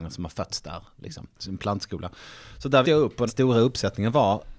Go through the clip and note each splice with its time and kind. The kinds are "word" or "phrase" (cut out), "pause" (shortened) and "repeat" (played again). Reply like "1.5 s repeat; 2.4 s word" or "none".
1.3 s pause; 2.8 s word; 3.3 s phrase